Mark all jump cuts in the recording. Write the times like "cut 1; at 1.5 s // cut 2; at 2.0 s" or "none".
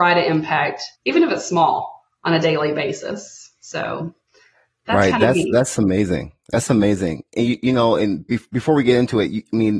cut 1; at 0.9 s